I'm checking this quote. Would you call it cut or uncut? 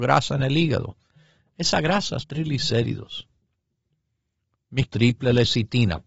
cut